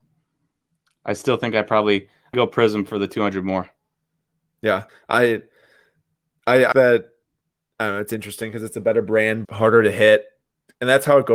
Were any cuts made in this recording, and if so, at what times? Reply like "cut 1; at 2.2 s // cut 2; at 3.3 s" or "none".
cut 1; at 2.3 s // cut 2; at 4.9 s // cut 3; at 6.7 s // cut 4; at 9.4 s